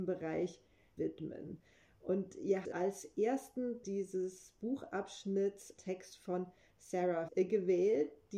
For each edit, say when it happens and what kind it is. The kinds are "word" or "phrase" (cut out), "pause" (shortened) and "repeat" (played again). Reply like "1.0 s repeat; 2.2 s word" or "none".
1.0 s word; 2.6 s word; 3.8 s word; 5.8 s word; 7.3 s word